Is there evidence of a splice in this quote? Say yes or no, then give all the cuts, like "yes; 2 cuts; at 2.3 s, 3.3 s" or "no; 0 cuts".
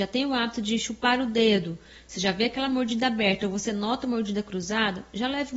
no; 0 cuts